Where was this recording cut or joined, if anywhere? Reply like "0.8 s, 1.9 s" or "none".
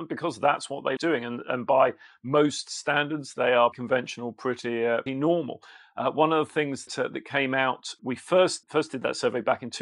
1.0 s, 3.7 s, 5.1 s, 6.9 s, 8.0 s, 8.6 s